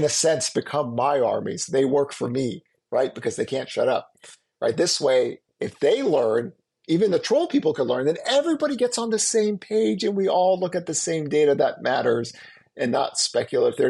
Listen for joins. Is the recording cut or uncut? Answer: uncut